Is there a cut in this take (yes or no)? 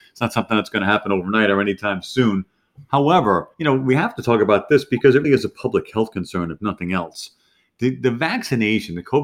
yes